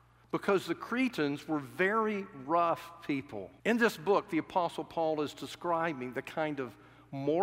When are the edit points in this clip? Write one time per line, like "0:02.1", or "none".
0:03.6